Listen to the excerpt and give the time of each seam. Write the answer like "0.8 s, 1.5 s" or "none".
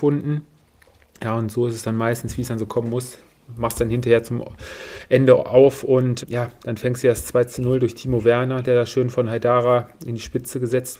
6.2 s